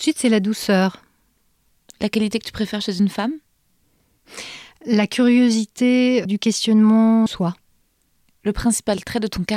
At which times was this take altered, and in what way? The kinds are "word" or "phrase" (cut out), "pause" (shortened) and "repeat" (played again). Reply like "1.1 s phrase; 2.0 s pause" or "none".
1.8 s pause; 6.2 s word; 7.3 s word